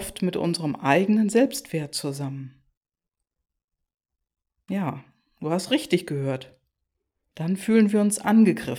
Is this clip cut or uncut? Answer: uncut